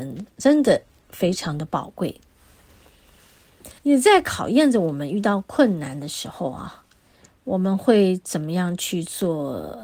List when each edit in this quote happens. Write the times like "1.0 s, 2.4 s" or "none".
3.8 s